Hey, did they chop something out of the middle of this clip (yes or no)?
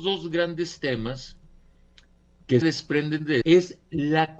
yes